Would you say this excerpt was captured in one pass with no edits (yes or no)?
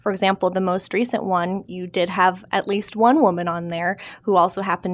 yes